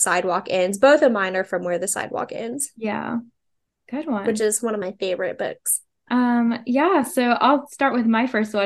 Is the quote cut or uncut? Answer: uncut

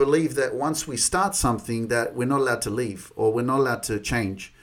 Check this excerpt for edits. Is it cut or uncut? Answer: uncut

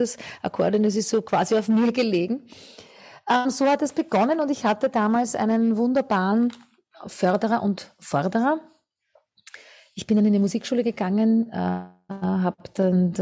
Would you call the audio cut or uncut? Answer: uncut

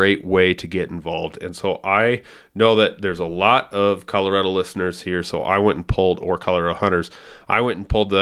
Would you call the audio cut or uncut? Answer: uncut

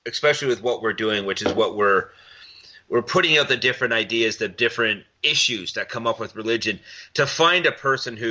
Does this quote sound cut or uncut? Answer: uncut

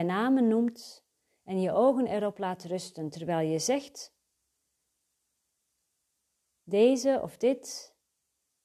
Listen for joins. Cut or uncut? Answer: uncut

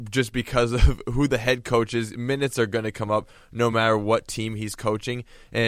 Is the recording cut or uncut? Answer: uncut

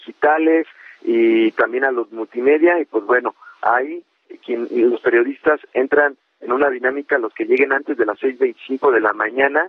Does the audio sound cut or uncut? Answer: uncut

